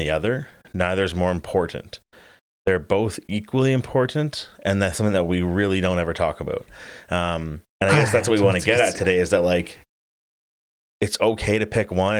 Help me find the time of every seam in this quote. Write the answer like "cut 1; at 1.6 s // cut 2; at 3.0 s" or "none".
cut 1; at 4.5 s // cut 2; at 4.9 s // cut 3; at 7.7 s